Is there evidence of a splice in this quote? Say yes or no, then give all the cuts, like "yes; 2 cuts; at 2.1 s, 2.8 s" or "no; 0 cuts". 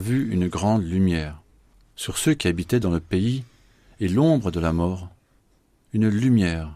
no; 0 cuts